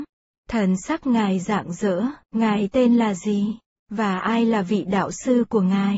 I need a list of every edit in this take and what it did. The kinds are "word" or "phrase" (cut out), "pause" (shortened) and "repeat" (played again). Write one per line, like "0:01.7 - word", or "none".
0:02.2 - pause